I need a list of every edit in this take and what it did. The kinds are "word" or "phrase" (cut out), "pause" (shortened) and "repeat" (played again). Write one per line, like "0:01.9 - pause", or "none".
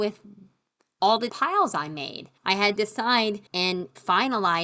0:01.3 - word
0:02.4 - pause
0:02.8 - word
0:03.5 - pause